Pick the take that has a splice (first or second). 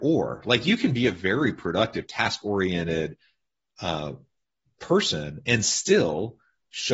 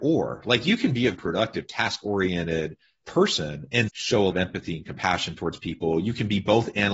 second